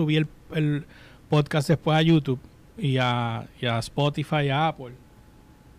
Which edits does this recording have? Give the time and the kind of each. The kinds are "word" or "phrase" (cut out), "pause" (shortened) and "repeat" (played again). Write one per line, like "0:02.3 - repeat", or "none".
none